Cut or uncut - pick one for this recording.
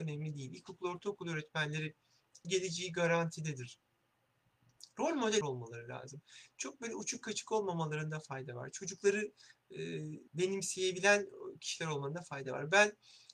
cut